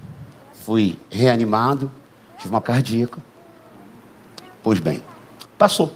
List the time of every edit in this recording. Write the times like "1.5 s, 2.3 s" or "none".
2.1 s, 2.6 s